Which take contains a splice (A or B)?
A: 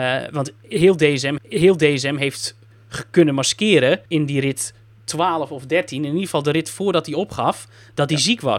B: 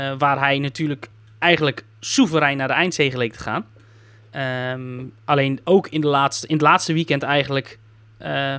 A